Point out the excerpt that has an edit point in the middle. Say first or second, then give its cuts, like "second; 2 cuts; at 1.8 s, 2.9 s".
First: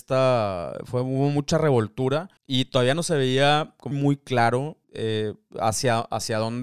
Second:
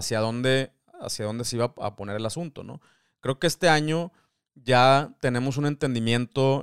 first; 3 cuts; at 2.4 s, 3.9 s, 4.8 s